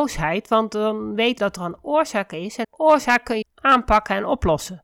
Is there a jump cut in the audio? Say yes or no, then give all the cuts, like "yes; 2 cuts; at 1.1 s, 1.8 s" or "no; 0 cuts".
yes; 3 cuts; at 1.4 s, 2.6 s, 3.4 s